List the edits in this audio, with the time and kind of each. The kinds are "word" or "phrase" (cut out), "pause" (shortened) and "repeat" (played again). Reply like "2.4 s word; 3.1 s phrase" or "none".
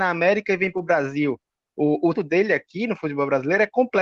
2.1 s word